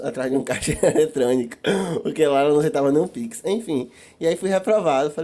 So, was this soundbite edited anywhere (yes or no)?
no